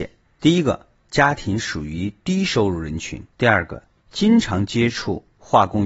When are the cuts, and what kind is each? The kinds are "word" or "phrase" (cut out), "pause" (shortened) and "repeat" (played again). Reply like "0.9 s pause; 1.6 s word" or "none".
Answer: 3.3 s pause